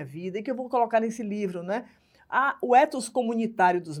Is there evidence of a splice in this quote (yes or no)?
no